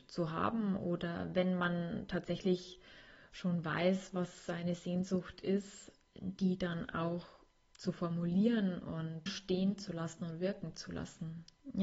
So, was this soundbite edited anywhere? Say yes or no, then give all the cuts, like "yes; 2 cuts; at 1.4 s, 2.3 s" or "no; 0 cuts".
yes; 1 cut; at 9.3 s